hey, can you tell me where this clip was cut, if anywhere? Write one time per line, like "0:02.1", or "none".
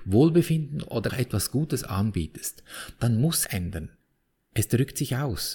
0:01.1
0:03.4